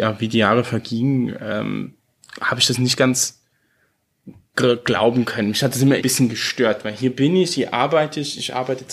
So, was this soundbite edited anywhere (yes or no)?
yes